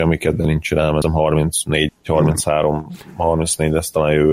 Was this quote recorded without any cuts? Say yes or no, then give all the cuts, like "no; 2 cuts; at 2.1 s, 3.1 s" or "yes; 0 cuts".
no; 2 cuts; at 1.0 s, 1.9 s